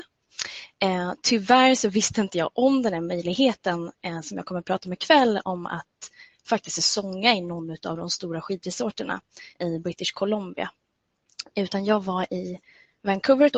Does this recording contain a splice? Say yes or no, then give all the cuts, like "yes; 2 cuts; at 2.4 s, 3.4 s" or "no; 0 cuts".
yes; 1 cut; at 9.5 s